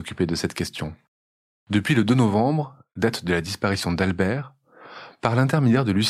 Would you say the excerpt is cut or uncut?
uncut